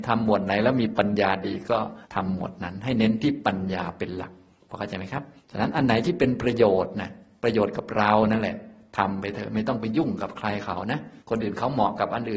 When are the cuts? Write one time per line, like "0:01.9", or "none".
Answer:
0:02.0
0:05.4
0:11.2